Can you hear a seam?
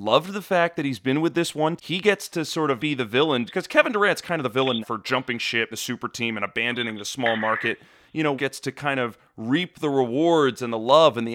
yes; 6 cuts; at 1.8 s, 2.8 s, 3.5 s, 4.8 s, 5.7 s, 8.4 s

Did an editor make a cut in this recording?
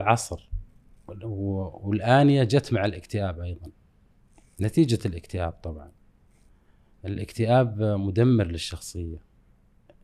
no; 0 cuts

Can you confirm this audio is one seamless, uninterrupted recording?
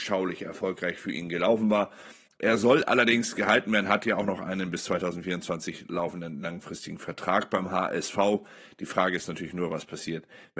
yes; 0 cuts

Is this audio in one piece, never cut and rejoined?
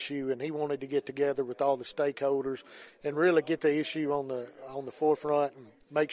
yes; 0 cuts

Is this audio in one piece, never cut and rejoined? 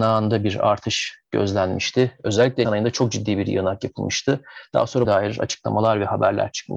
no; 2 cuts; at 2.6 s, 5.0 s

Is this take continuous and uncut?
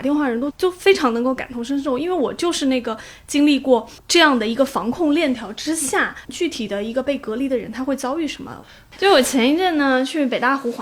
no; 1 cut; at 4.0 s

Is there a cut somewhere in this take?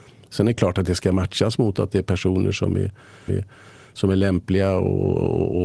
yes; 1 cut; at 3.3 s

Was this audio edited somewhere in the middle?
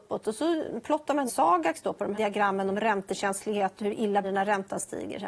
yes; 3 cuts; at 1.3 s, 2.1 s, 4.2 s

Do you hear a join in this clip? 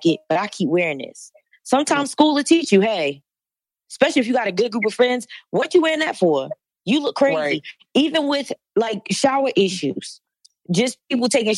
no; 0 cuts

